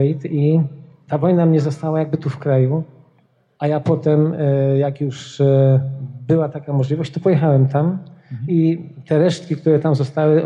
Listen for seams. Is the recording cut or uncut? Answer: uncut